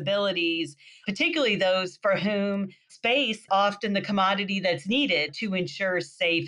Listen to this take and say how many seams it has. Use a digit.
1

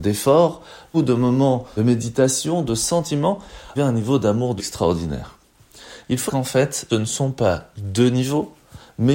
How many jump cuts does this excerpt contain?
7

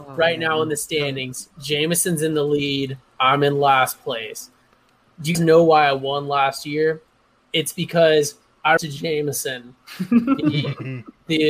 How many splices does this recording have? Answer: 2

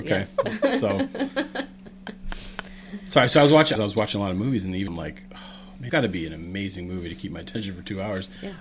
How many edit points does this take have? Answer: 3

